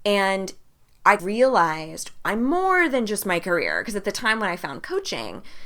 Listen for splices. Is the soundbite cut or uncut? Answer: cut